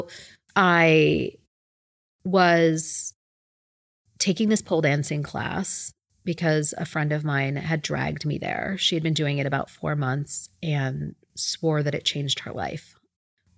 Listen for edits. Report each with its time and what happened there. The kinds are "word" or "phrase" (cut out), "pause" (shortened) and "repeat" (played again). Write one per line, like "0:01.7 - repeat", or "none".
none